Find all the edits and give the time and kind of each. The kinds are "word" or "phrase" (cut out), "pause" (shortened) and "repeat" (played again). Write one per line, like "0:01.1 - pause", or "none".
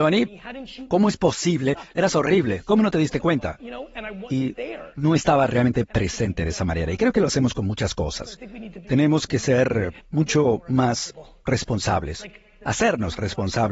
0:10.0 - pause